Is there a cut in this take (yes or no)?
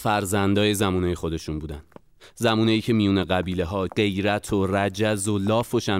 yes